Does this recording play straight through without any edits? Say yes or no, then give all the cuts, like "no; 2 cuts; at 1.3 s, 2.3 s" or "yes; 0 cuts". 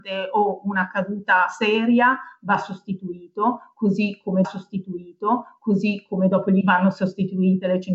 no; 2 cuts; at 4.4 s, 6.6 s